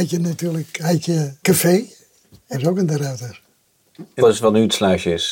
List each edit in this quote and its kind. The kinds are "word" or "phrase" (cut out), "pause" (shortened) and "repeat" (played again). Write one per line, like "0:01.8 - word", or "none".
0:01.4 - word
0:02.5 - word
0:04.2 - word